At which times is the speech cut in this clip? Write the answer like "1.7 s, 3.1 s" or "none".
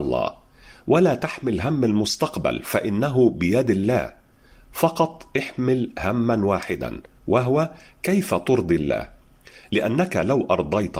none